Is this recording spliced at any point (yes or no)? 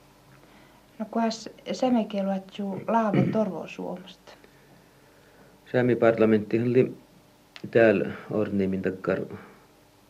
no